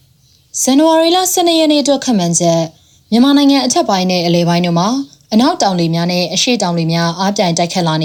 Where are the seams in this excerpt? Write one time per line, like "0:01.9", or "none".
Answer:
none